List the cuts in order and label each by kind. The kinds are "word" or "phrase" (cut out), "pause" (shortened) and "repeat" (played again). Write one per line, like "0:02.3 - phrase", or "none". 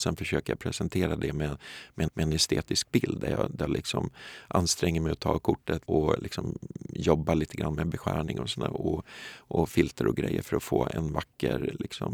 0:02.1 - repeat
0:05.9 - word

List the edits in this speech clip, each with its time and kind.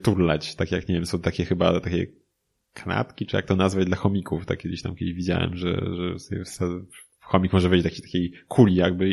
none

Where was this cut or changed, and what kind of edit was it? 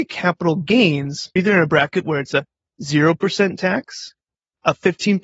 0:01.4 - word

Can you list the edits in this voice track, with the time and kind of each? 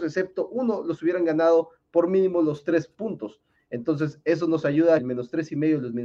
0:05.0 - phrase

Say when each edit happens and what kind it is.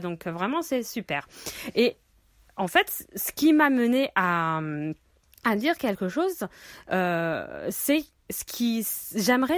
none

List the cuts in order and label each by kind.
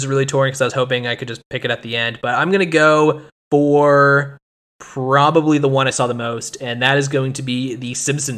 0:03.3 - pause

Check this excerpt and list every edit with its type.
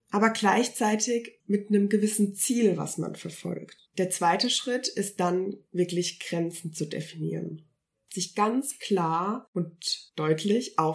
0:01.4 - pause
0:03.9 - pause

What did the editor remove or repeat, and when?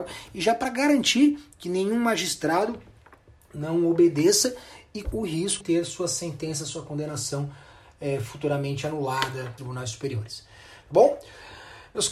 0:05.0 - word
0:05.6 - word
0:09.6 - word

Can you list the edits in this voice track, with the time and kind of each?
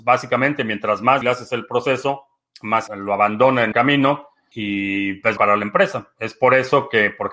0:01.2 - word
0:02.9 - word
0:03.7 - word
0:04.5 - word
0:05.4 - word

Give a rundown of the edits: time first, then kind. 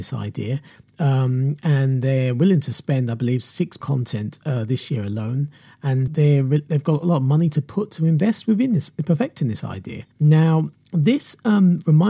0:03.8 - phrase
0:06.1 - word
0:10.1 - pause

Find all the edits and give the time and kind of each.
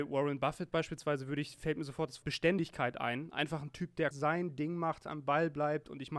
0:02.2 - word
0:04.1 - word

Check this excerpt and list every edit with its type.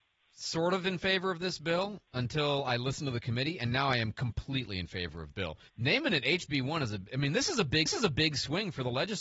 0:02.1 - pause
0:05.3 - word
0:05.7 - pause
0:07.9 - repeat

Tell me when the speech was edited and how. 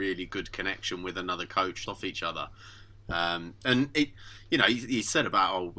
0:01.9 - phrase

